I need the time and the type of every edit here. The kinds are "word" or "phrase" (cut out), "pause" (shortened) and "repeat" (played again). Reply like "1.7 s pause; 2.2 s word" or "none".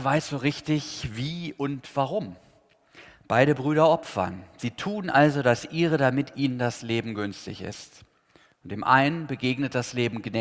none

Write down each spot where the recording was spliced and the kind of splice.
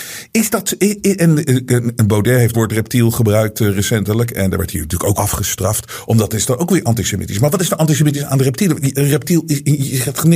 2.5 s phrase; 5.1 s word

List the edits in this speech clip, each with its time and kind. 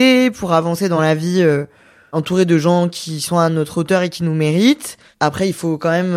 none

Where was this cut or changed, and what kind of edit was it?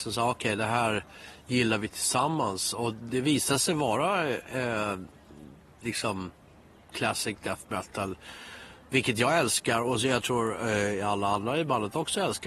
none

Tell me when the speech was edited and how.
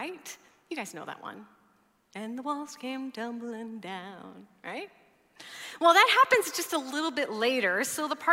none

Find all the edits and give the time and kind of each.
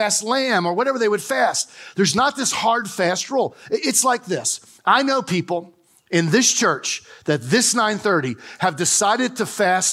none

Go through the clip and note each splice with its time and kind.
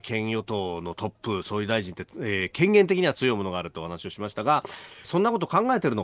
5.0 s phrase

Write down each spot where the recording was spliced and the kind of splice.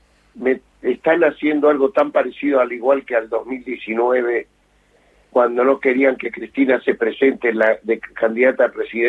none

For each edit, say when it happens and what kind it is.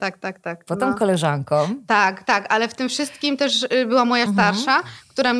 4.3 s word

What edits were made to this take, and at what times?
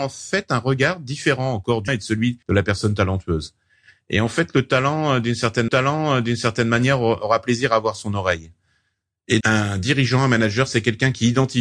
1.9 s word; 2.4 s pause; 5.7 s repeat; 9.4 s word

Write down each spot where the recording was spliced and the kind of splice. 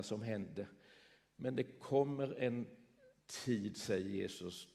none

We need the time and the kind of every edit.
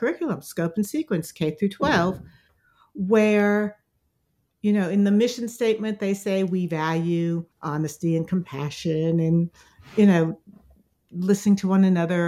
7.5 s pause

